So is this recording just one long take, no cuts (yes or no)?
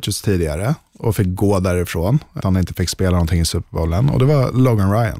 no